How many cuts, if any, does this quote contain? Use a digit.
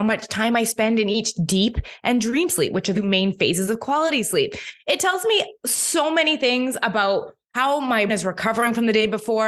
2